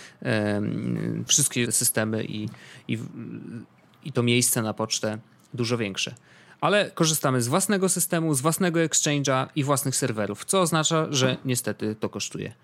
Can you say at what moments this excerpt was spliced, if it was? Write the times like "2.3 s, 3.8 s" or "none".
1.3 s, 1.7 s